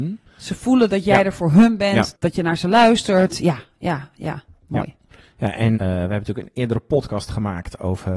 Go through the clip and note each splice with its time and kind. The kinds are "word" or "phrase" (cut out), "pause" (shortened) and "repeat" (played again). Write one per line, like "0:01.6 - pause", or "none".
0:05.7 - word